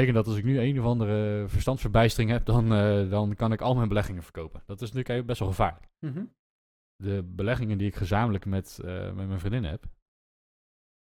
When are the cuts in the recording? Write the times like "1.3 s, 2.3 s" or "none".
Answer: none